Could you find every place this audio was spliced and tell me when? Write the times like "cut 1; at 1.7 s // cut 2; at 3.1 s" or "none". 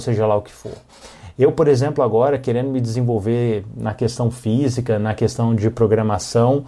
none